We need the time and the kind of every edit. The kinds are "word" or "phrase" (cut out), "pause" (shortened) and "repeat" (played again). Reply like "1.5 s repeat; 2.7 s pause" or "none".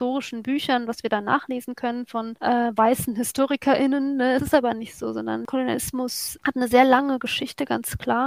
none